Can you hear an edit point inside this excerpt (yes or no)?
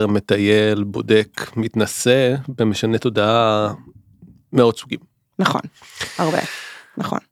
no